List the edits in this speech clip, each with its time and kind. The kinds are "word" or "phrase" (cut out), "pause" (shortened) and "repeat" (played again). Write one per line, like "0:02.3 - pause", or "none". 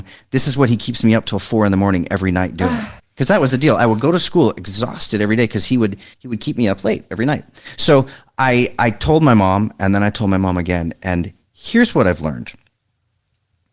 0:03.0 - pause
0:06.1 - pause